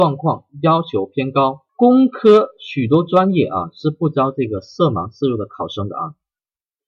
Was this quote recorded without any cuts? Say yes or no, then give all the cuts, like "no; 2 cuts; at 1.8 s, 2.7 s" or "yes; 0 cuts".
no; 1 cut; at 1.7 s